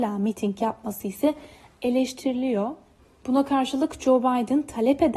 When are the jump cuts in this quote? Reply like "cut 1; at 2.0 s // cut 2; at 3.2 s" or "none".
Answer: none